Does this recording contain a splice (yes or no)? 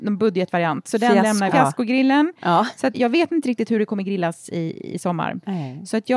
yes